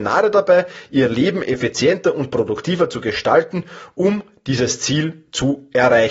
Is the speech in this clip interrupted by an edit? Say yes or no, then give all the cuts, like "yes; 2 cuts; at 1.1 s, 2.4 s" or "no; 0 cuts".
no; 0 cuts